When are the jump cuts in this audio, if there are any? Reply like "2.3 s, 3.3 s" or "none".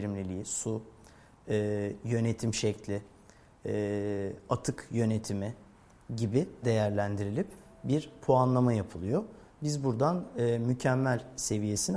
6.6 s

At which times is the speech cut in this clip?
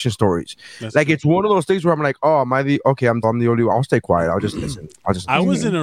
3.2 s

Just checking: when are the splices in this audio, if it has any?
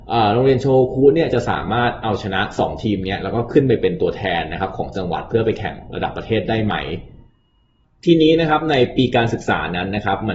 none

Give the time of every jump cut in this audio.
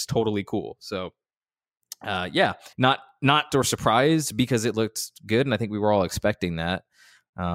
2.7 s, 3.5 s

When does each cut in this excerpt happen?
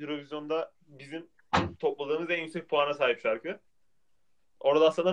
none

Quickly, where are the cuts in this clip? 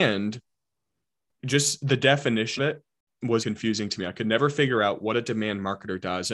2.6 s, 3.4 s

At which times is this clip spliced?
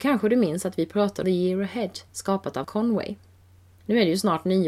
1.2 s, 2.1 s, 2.6 s

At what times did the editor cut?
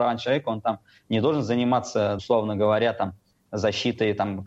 2.2 s

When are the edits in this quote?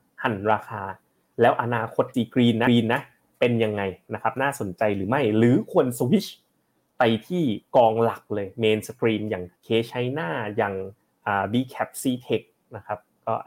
2.1 s, 2.7 s, 9.6 s

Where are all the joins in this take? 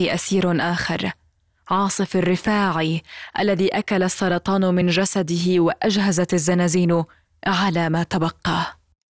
none

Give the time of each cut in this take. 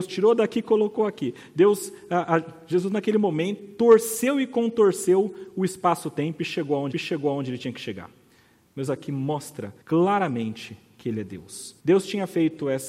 3.6 s, 6.9 s, 8.9 s, 9.8 s, 11.8 s

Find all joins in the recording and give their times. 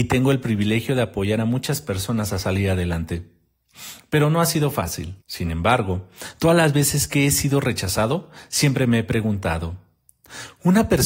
5.2 s

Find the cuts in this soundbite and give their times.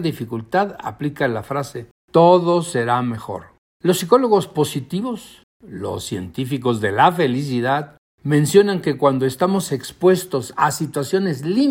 none

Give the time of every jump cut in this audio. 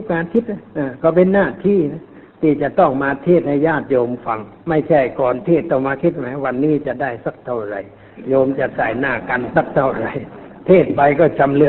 4.6 s

